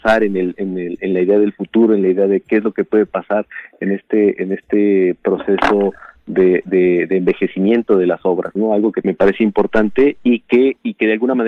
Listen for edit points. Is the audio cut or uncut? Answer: cut